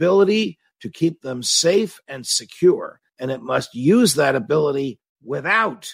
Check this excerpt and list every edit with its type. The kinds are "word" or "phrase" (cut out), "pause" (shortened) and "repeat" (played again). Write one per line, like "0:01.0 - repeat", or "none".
0:03.1 - pause